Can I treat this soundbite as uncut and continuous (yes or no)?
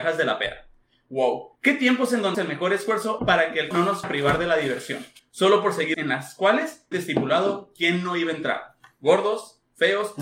no